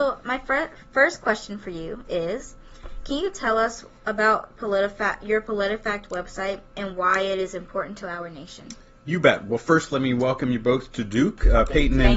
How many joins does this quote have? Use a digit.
0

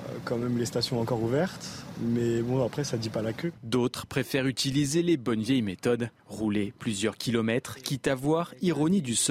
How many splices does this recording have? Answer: 2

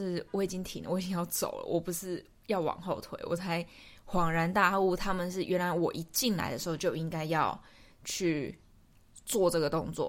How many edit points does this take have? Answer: 0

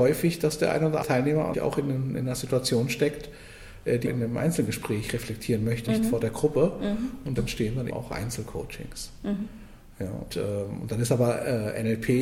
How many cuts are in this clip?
7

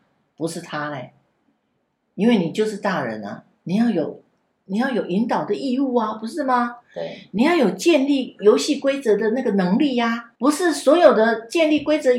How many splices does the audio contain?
1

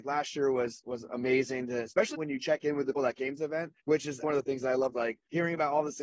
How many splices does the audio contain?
6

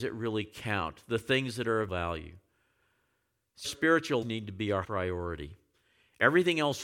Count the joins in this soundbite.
4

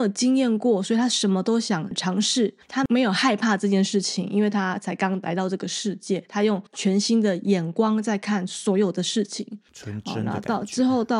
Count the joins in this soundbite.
2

